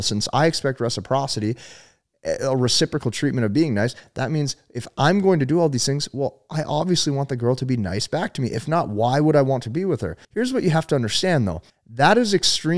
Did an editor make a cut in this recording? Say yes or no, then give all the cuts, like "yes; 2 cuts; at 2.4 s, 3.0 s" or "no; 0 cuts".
yes; 2 cuts; at 10.2 s, 11.7 s